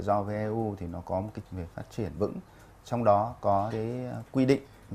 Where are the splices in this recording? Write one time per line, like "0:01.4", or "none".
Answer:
0:01.4
0:02.2
0:03.7